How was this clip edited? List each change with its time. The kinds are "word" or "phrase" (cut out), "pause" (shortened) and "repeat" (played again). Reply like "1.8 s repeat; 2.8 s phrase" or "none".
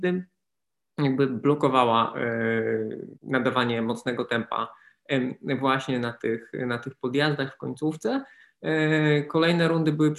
3.2 s pause

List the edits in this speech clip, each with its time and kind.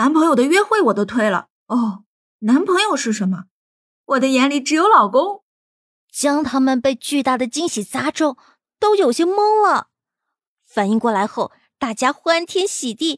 1.6 s pause

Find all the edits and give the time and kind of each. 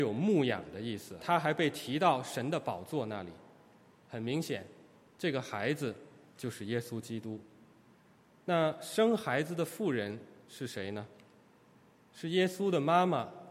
1.2 s phrase

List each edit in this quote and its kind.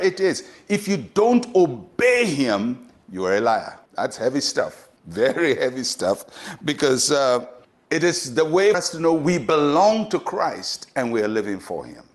3.9 s pause; 5.0 s pause; 7.6 s pause; 8.7 s word

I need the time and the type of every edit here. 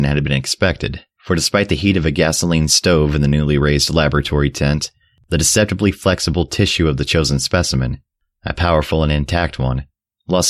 1.1 s pause

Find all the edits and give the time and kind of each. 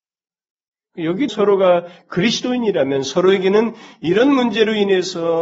1.3 s word

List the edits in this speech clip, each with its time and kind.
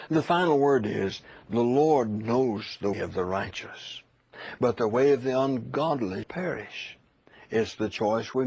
2.9 s word; 6.2 s word

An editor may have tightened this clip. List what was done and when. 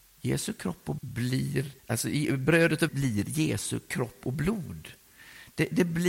1.0 s word; 1.8 s pause; 2.9 s word

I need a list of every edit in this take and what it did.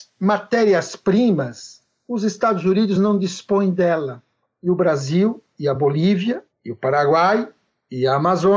none

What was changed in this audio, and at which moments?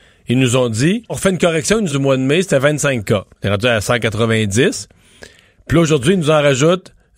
1.1 s word; 1.9 s phrase; 3.3 s pause

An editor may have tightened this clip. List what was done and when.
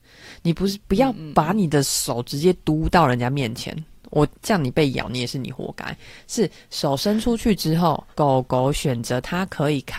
8.1 s pause

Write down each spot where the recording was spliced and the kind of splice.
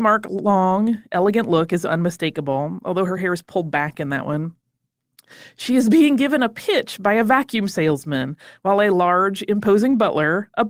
none

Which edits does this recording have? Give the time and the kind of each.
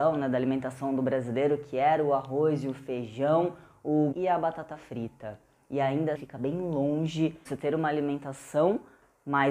4.1 s word; 6.2 s word; 7.5 s word

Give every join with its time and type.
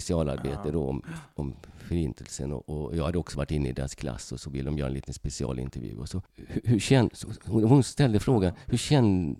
6.3 s pause

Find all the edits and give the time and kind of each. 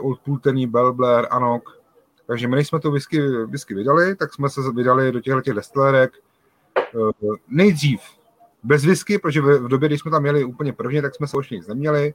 none

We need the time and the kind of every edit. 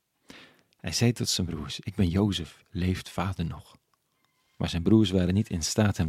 none

